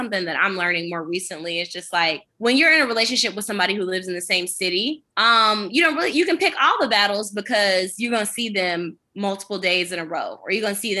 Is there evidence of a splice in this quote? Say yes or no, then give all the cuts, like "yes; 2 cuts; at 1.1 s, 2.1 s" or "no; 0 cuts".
yes; 2 cuts; at 2.3 s, 5.1 s